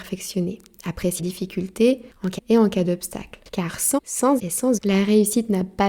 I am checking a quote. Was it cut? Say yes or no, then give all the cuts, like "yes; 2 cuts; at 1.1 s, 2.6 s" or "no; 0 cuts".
yes; 6 cuts; at 1.2 s, 2.4 s, 3.5 s, 4.0 s, 4.4 s, 4.8 s